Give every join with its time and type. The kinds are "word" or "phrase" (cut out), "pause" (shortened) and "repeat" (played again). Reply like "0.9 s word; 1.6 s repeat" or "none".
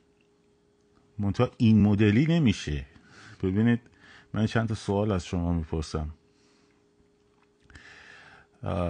none

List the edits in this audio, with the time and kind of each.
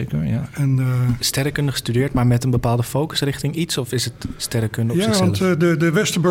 1.2 s phrase

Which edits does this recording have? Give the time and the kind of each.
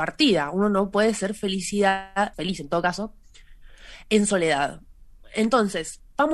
2.3 s word

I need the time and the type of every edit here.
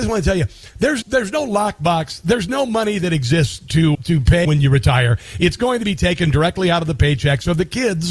1.0 s word; 3.9 s word; 4.4 s word

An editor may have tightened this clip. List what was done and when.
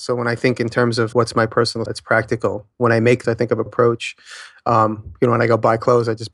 1.1 s word; 1.9 s word; 3.2 s word; 3.7 s word

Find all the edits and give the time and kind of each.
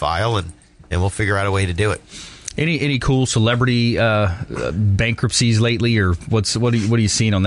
none

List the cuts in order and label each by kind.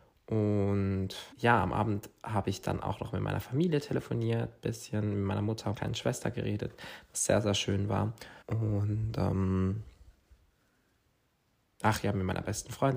1.3 s pause; 5.7 s word; 8.4 s pause

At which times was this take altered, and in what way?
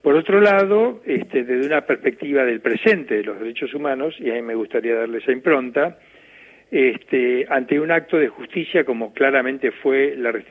none

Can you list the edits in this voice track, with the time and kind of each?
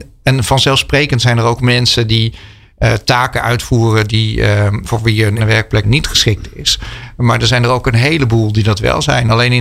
1.6 s word; 4.8 s word; 5.4 s word; 5.8 s word

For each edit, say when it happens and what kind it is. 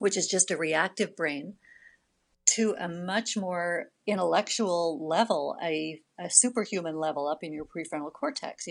none

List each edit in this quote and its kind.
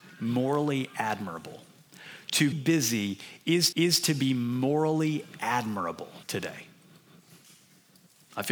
2.5 s word; 3.7 s repeat; 6.2 s pause

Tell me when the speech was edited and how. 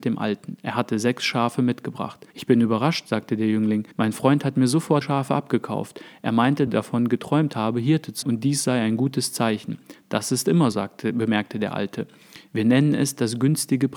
2.3 s pause; 3.9 s pause; 5.0 s phrase; 6.7 s phrase; 8.2 s word; 10.7 s word

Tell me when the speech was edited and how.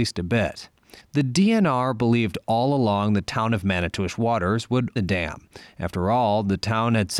1.0 s pause; 5.0 s word

